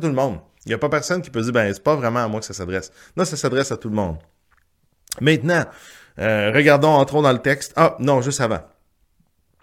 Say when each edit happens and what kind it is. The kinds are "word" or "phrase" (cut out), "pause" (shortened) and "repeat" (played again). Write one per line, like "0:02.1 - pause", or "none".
none